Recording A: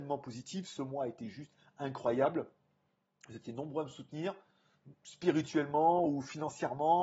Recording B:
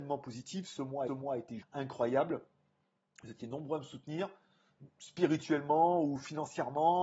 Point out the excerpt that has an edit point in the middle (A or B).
B